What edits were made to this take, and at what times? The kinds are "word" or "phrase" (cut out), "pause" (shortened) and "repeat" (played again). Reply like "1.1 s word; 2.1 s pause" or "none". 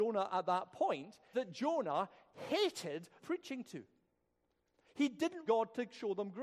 1.3 s word; 3.2 s phrase; 5.5 s word

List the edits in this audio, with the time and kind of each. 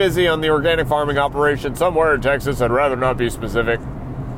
none

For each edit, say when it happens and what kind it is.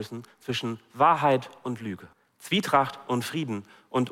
2.1 s pause

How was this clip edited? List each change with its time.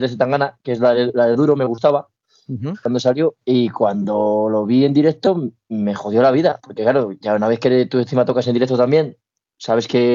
none

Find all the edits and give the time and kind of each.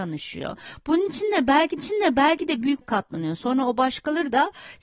1.8 s repeat; 2.8 s word

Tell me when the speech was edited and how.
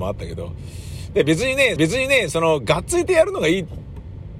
1.8 s repeat

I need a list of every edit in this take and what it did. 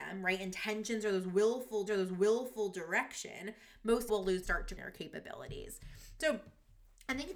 1.9 s repeat; 4.1 s word; 4.4 s phrase; 4.8 s word

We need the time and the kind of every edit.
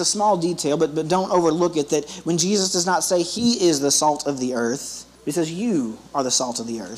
5.1 s pause

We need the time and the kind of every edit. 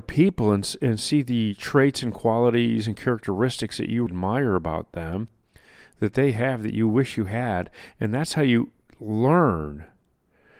4.1 s word

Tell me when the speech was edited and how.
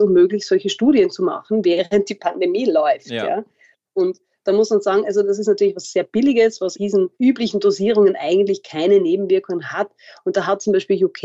6.7 s word; 7.1 s pause

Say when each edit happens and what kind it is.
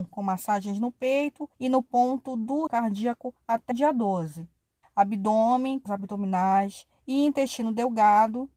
1.5 s pause; 2.7 s word; 3.7 s word; 4.8 s pause; 5.9 s word; 6.9 s pause

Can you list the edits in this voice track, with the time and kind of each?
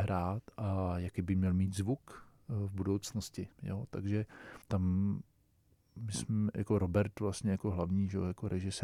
3.5 s pause; 4.6 s pause

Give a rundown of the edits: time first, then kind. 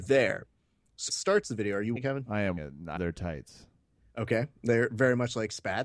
1.1 s word; 2.0 s word; 2.6 s word; 3.0 s word

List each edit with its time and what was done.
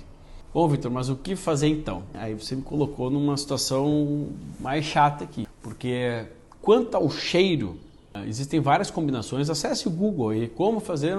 none

